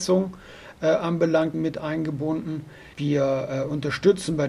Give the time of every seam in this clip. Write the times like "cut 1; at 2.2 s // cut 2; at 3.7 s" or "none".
cut 1; at 1.5 s // cut 2; at 2.9 s